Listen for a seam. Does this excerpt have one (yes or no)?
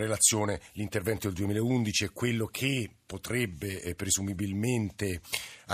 no